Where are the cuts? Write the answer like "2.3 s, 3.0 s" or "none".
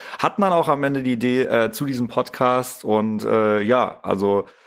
none